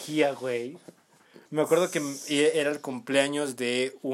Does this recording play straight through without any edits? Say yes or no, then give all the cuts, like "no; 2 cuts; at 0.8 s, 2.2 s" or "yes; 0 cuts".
no; 1 cut; at 1.5 s